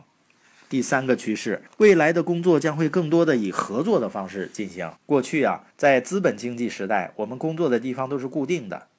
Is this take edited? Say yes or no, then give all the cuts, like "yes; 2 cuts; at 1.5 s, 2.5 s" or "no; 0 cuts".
yes; 3 cuts; at 1.7 s, 5.0 s, 5.7 s